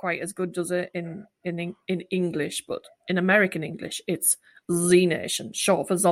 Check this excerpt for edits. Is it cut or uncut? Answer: uncut